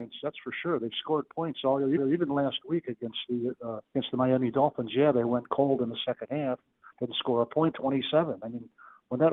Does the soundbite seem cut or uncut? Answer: cut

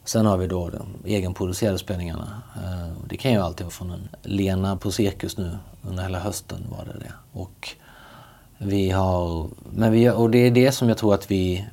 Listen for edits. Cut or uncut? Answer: cut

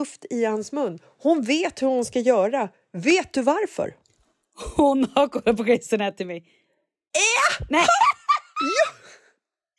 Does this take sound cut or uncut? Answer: uncut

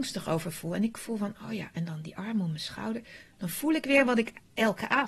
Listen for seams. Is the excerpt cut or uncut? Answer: uncut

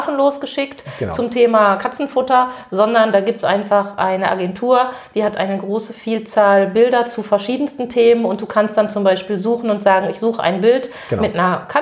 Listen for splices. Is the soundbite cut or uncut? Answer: uncut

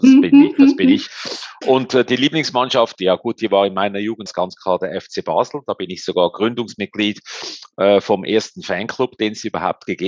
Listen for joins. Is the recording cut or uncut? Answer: cut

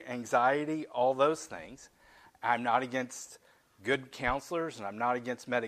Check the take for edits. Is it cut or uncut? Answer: uncut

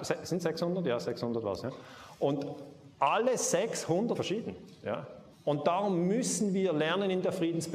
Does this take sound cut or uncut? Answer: cut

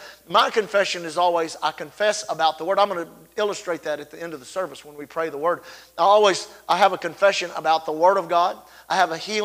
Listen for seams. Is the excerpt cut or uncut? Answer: uncut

